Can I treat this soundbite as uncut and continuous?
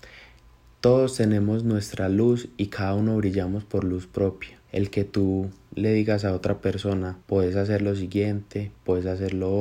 no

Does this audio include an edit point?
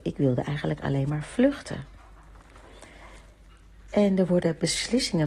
no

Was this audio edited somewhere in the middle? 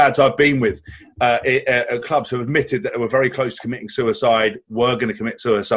no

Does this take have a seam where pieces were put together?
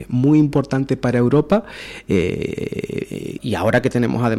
yes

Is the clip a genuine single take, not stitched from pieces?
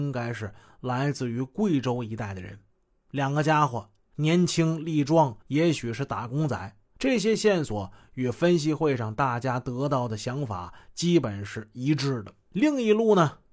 no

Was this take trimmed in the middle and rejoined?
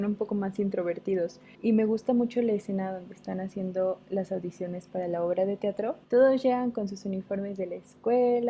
yes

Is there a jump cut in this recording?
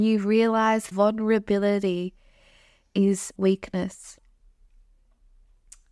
yes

